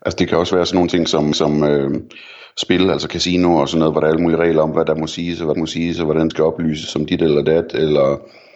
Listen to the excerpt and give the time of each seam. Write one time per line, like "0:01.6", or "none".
0:01.3
0:05.5
0:06.3

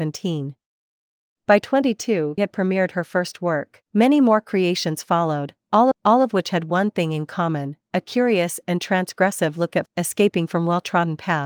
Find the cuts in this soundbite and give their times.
0:02.4
0:03.9
0:05.9
0:09.9

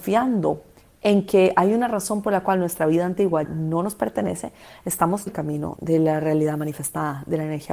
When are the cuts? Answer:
0:03.4
0:05.3

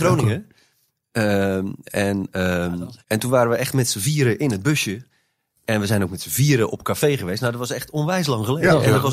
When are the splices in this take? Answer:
0:03.0

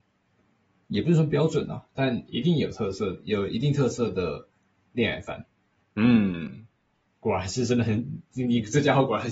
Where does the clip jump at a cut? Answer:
none

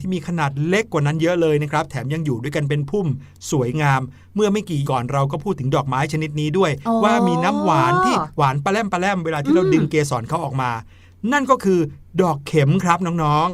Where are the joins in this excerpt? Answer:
0:04.9

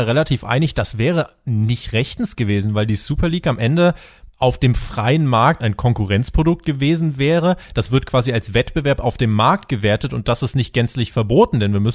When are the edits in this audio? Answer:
0:04.3
0:05.6

